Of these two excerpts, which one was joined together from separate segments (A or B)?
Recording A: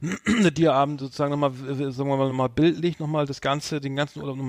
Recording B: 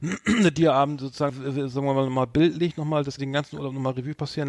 B